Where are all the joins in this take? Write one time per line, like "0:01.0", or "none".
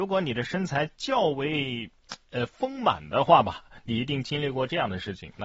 none